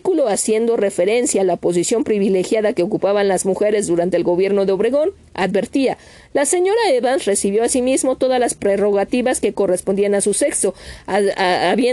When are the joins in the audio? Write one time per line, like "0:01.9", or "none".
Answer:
none